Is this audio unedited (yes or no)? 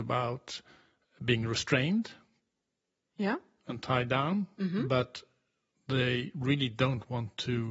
yes